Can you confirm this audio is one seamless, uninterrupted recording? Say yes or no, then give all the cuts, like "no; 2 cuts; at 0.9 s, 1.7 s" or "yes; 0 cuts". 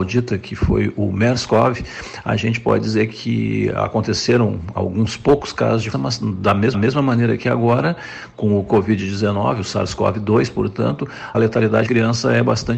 no; 4 cuts; at 5.9 s, 6.7 s, 11.3 s, 11.9 s